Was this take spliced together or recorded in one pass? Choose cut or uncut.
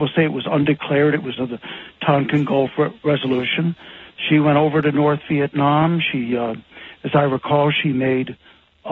cut